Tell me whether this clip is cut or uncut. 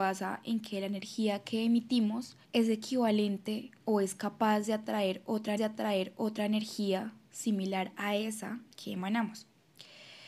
cut